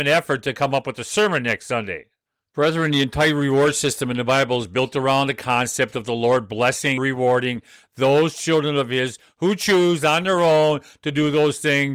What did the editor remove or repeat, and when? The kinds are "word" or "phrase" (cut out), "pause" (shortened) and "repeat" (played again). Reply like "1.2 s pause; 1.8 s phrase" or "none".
7.0 s word

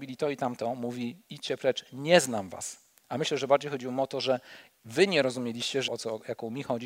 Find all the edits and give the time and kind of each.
5.9 s word

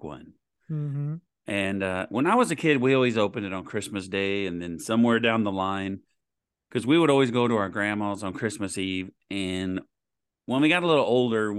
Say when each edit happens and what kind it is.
none

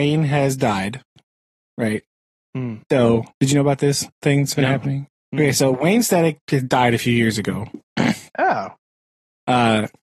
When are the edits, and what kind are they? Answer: none

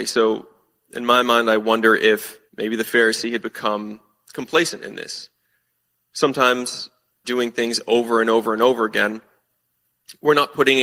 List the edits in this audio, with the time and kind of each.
2.5 s pause; 7.2 s phrase

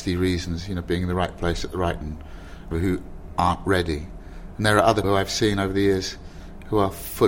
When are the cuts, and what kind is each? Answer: 2.0 s word; 2.7 s word; 5.0 s word

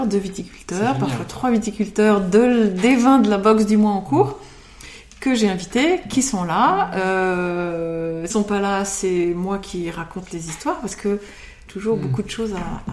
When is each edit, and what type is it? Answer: 8.3 s word; 11.7 s word

